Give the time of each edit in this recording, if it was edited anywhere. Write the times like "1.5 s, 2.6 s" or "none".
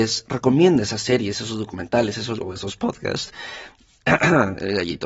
2.4 s

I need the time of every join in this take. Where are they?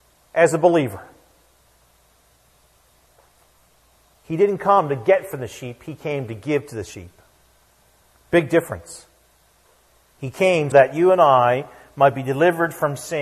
10.7 s

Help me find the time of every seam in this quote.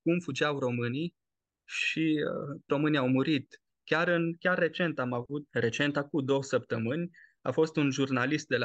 2.7 s, 5.5 s

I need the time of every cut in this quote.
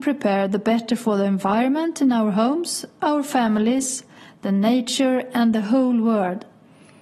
none

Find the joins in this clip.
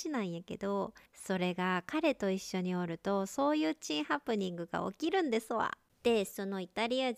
1.1 s

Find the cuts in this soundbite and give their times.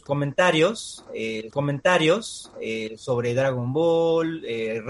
1.5 s

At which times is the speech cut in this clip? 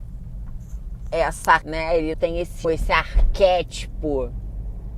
1.6 s, 2.1 s, 2.6 s

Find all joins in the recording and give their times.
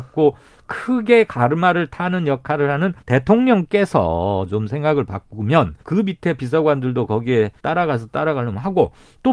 3.0 s, 5.8 s, 7.6 s

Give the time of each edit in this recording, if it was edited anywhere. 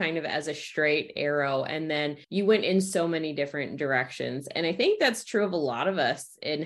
2.2 s

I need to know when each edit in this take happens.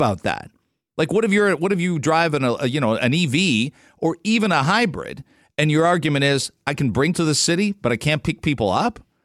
7.1 s

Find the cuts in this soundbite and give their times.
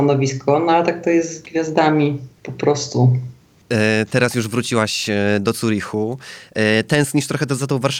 2.3 s

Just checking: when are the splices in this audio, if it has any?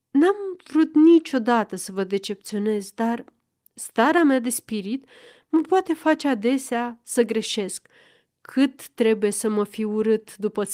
none

